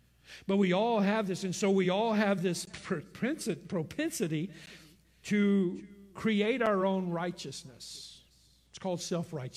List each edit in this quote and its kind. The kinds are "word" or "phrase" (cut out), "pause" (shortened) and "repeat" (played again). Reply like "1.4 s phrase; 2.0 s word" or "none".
none